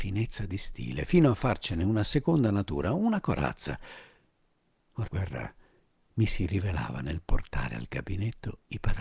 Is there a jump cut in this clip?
yes; 1 cut; at 5.1 s

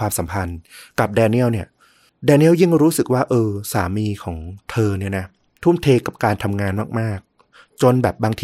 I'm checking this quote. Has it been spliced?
no; 0 cuts

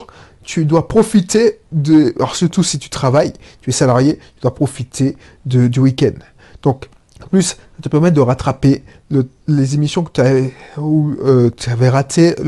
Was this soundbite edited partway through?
no; 0 cuts

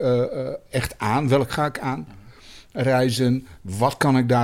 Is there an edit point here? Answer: yes; 1 cut; at 1.5 s

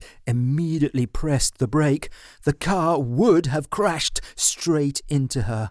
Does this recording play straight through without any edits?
yes; 0 cuts

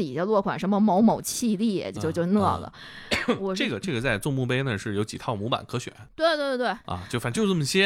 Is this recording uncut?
no; 1 cut; at 2.0 s

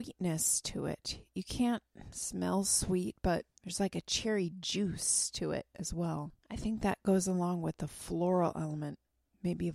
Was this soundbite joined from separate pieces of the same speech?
yes; 2 cuts; at 3.5 s, 6.4 s

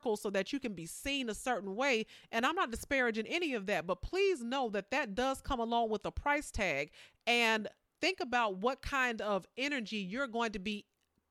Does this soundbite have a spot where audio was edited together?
no; 0 cuts

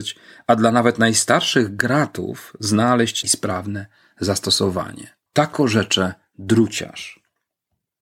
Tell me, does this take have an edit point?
yes; 2 cuts; at 3.2 s, 5.3 s

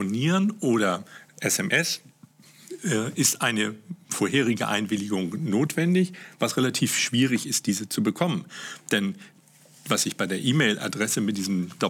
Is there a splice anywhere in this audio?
no; 0 cuts

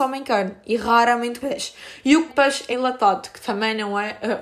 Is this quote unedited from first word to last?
no; 3 cuts; at 1.4 s, 2.3 s, 2.7 s

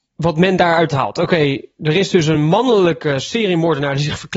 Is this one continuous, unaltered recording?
yes; 0 cuts

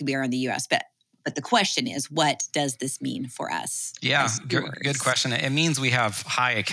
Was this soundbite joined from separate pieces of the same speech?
no; 0 cuts

